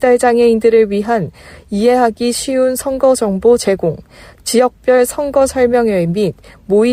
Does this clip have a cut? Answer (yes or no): no